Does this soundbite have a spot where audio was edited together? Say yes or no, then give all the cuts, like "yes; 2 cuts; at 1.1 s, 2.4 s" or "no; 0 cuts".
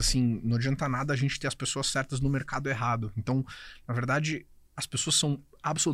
no; 0 cuts